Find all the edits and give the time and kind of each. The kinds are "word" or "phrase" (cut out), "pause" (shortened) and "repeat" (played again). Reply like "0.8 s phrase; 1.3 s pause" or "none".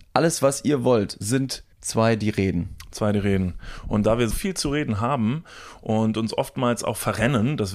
1.7 s pause; 4.3 s word